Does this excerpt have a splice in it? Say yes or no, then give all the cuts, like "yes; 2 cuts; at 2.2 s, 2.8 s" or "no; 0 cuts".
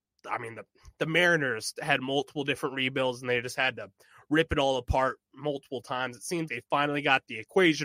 yes; 1 cut; at 6.5 s